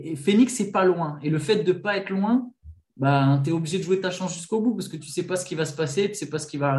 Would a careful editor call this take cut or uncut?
uncut